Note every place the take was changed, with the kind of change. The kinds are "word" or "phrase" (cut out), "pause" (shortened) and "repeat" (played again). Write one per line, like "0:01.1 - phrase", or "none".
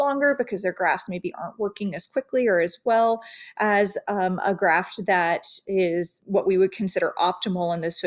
none